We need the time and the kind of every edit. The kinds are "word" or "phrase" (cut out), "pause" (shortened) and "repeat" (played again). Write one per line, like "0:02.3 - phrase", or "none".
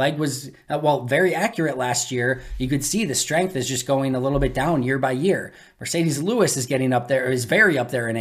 none